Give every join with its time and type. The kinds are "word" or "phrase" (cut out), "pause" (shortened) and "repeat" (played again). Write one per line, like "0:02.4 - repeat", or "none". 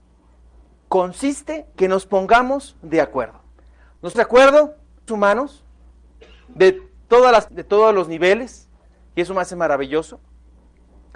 0:01.7 - word
0:04.1 - word
0:05.1 - word
0:07.5 - word

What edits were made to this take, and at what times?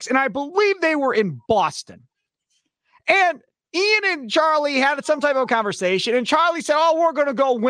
none

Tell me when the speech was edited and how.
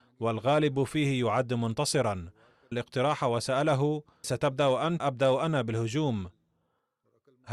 0:02.7 - phrase
0:04.2 - word
0:05.0 - word

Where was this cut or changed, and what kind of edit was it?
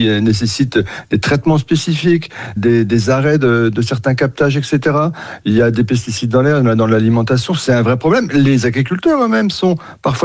0:02.6 - word

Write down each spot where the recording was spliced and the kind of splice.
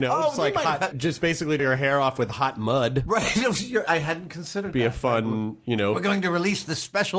0:00.9 - phrase
0:01.6 - phrase

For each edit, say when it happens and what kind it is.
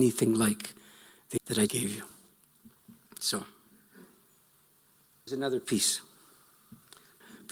0:01.4 - word
0:01.7 - word
0:05.3 - word

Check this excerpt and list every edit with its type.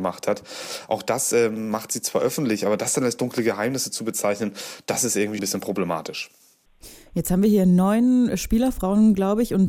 0:05.4 - word

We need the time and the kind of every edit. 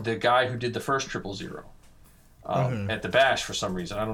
none

